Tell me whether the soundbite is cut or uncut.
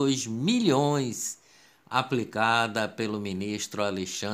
uncut